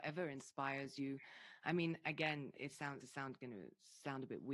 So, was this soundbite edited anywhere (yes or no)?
yes